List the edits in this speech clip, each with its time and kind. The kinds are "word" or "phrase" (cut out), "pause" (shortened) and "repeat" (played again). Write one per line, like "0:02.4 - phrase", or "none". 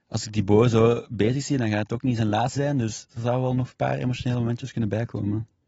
0:02.6 - word
0:03.1 - pause